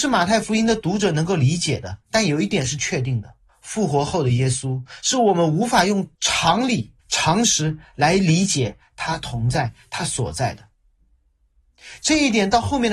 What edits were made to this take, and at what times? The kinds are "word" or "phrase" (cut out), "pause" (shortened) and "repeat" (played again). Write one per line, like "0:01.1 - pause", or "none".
0:02.0 - pause
0:03.5 - pause
0:06.1 - pause
0:07.0 - pause